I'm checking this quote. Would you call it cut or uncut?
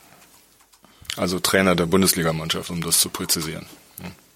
uncut